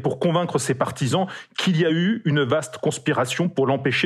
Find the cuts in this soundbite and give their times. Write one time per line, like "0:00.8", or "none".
none